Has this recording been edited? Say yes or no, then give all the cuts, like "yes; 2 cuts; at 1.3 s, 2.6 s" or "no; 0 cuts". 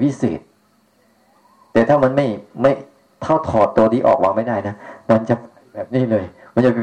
no; 0 cuts